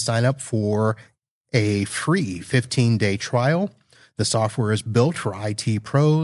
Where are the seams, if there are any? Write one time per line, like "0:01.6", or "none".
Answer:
none